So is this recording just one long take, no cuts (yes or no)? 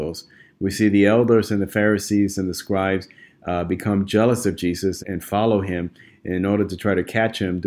no